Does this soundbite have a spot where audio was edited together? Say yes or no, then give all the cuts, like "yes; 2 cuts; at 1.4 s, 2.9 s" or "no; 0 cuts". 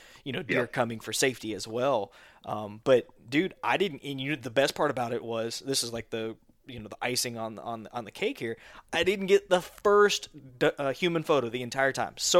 no; 0 cuts